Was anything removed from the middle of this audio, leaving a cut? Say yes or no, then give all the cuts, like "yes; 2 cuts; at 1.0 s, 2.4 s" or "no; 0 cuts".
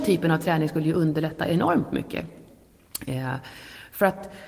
no; 0 cuts